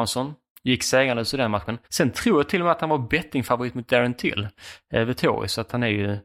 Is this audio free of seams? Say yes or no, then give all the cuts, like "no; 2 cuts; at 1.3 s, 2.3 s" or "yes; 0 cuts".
no; 1 cut; at 1.8 s